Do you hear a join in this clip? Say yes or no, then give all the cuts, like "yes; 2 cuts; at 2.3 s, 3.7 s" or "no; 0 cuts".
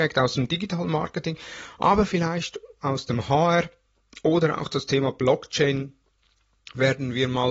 no; 0 cuts